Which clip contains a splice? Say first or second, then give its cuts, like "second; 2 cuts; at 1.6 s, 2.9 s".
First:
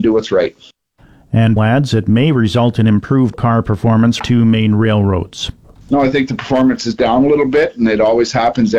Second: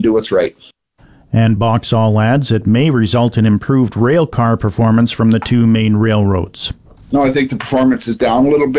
first; 3 cuts; at 1.6 s, 3.3 s, 4.2 s